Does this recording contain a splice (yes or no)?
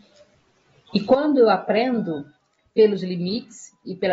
no